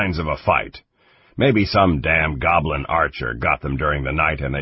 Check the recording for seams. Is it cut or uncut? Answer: uncut